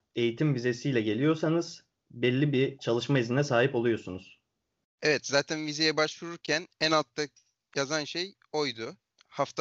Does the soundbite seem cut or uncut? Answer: uncut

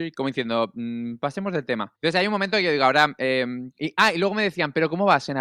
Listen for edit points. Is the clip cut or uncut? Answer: cut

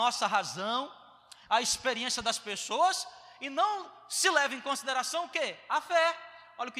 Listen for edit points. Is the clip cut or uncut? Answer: uncut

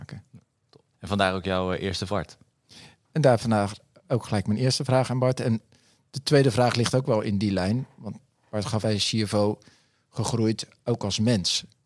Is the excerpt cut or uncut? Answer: cut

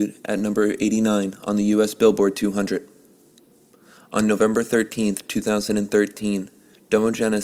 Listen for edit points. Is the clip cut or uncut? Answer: uncut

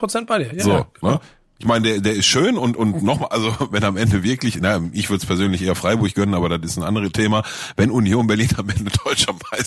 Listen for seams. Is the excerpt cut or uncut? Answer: uncut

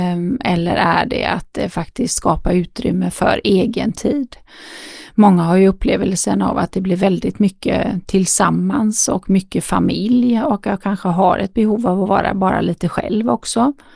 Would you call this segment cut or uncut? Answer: uncut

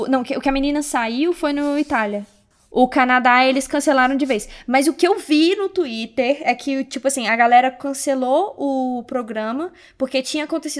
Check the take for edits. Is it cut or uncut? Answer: uncut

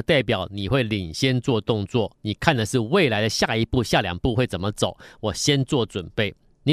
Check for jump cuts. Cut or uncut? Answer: uncut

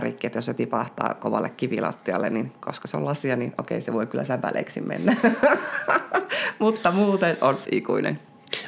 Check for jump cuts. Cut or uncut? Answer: cut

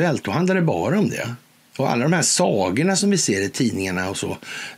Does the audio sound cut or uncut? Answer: cut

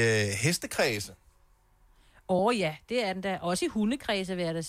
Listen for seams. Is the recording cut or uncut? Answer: uncut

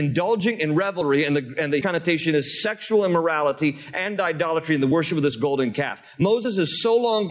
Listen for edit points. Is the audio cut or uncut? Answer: cut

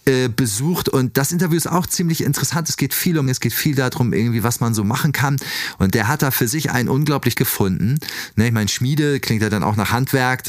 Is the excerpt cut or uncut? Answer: cut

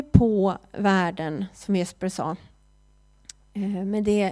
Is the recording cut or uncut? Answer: uncut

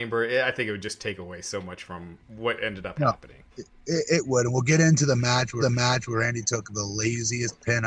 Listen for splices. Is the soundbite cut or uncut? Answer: cut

